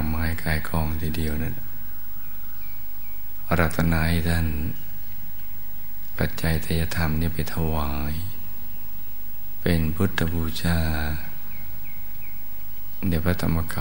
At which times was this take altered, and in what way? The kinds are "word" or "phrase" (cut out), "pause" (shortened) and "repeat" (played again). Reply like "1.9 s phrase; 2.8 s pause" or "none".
6.1 s phrase